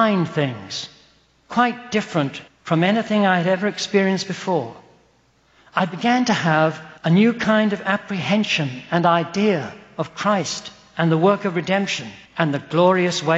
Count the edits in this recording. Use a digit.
3